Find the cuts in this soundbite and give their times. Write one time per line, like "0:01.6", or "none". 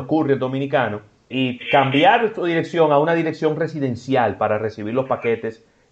0:01.3